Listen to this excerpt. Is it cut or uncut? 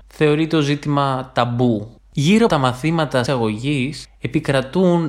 cut